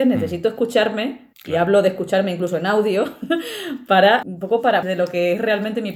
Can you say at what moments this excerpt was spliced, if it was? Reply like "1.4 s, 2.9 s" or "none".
1.3 s, 4.2 s, 4.8 s